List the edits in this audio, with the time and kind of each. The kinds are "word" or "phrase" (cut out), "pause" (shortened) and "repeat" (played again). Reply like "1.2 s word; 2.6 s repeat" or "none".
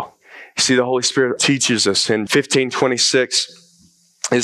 1.4 s word; 2.3 s word